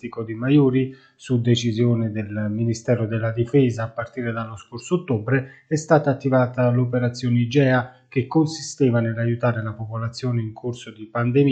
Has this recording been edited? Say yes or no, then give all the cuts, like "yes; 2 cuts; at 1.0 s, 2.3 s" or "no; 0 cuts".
no; 0 cuts